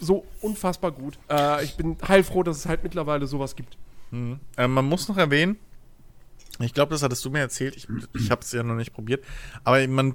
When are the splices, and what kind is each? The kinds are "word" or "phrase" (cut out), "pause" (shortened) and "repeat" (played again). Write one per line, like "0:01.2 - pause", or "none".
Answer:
0:01.2 - pause